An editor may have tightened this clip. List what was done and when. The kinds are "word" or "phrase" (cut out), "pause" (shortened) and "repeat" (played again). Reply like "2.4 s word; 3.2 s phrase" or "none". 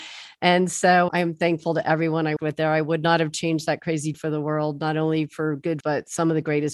1.1 s word; 2.4 s word; 4.1 s word; 5.8 s word